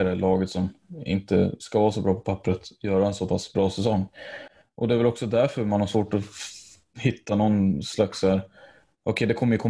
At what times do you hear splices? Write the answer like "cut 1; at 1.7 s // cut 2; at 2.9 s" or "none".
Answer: none